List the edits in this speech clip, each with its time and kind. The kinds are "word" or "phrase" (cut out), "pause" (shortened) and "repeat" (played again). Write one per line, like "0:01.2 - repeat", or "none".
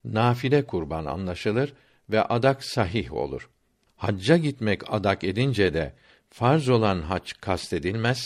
none